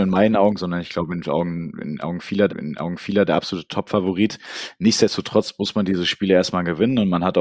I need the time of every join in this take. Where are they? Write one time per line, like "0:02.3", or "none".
0:02.5